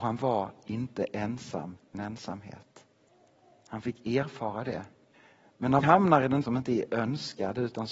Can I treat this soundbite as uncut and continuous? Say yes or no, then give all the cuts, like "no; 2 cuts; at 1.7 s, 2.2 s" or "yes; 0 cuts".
no; 4 cuts; at 1.9 s, 5.1 s, 5.8 s, 6.4 s